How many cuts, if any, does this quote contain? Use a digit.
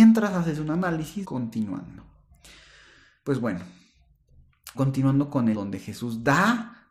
3